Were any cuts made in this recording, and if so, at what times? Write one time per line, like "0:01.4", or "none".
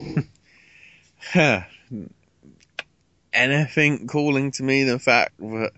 0:02.1